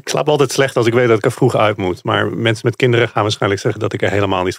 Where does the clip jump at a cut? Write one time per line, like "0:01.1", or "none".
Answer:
none